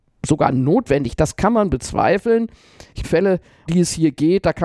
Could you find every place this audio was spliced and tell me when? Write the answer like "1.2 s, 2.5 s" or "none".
3.0 s, 3.7 s